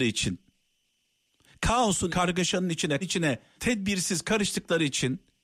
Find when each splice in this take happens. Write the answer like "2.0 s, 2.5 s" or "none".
2.1 s, 3.0 s, 3.6 s